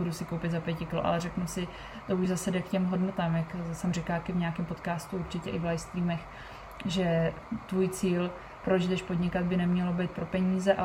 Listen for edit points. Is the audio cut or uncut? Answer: uncut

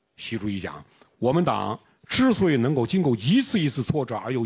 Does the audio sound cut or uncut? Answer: uncut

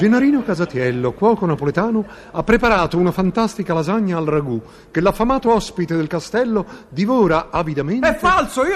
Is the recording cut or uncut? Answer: uncut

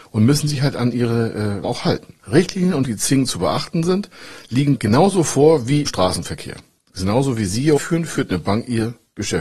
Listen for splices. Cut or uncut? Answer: cut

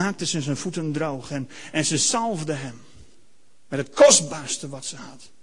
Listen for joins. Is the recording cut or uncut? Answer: uncut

